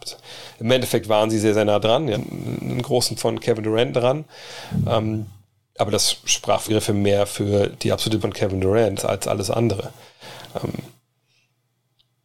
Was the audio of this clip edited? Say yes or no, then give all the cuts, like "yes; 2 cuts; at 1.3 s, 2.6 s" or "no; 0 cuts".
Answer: yes; 6 cuts; at 2.1 s, 3.2 s, 3.9 s, 6.7 s, 8.2 s, 9.0 s